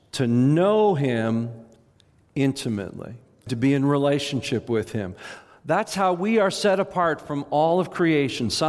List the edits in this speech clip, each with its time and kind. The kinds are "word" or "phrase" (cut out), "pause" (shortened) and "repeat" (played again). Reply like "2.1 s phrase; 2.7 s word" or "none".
none